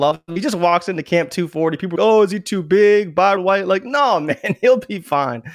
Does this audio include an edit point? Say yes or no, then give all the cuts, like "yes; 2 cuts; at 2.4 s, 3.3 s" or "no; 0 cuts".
yes; 2 cuts; at 2.0 s, 3.4 s